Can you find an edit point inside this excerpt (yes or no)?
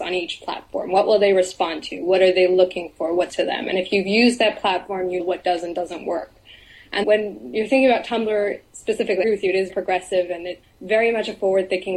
yes